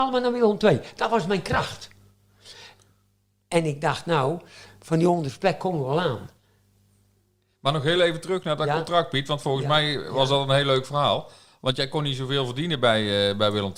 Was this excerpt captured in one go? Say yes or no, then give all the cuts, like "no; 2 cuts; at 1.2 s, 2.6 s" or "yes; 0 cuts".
yes; 0 cuts